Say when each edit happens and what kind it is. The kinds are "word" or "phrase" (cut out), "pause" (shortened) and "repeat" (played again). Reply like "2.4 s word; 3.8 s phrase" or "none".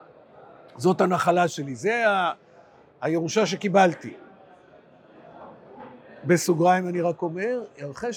none